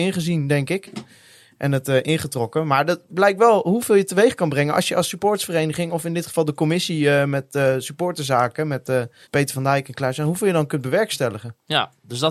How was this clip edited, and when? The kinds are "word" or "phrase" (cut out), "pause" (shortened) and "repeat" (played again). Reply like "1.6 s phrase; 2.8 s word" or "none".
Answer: 9.2 s pause